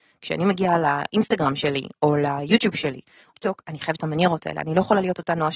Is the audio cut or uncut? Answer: cut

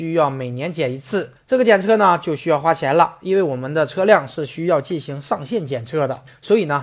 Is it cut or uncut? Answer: uncut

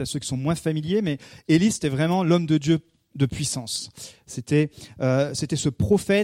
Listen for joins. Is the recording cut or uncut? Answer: uncut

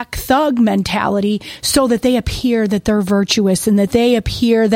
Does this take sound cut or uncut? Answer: uncut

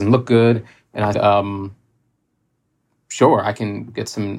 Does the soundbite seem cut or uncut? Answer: cut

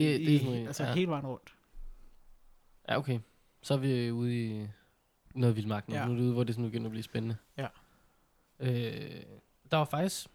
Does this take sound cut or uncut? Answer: uncut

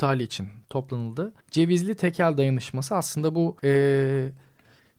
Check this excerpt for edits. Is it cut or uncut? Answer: cut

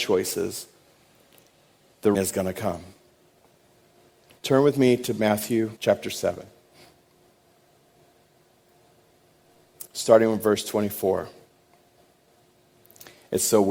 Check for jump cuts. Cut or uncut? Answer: cut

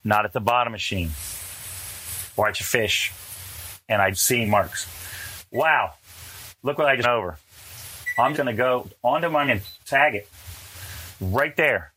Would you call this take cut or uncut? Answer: cut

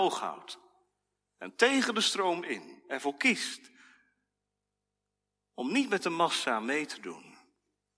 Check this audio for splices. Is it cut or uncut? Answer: uncut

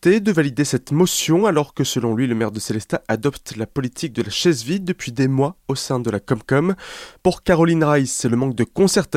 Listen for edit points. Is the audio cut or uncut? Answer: uncut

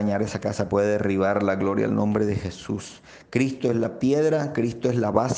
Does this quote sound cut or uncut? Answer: uncut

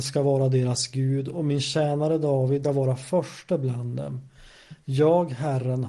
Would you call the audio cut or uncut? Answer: cut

